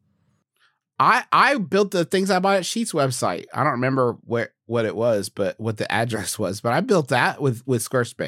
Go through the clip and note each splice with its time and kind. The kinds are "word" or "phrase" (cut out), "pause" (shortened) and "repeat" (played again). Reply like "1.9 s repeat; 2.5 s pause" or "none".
none